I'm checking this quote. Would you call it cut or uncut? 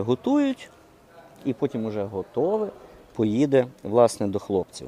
uncut